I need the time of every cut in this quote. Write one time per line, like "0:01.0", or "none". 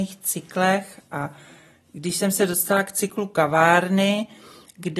none